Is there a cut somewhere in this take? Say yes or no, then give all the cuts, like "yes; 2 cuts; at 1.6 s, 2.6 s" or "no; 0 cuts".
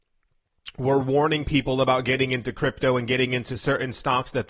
no; 0 cuts